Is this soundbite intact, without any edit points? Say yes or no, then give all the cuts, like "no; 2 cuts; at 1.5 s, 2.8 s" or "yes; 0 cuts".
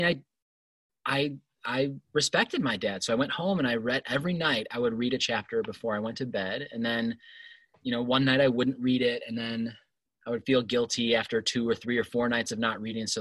yes; 0 cuts